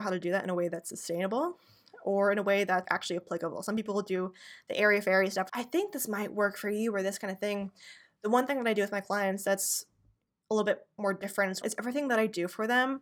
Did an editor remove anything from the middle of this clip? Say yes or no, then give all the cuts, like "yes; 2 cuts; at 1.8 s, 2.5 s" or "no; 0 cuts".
yes; 3 cuts; at 2.8 s, 5.5 s, 11.6 s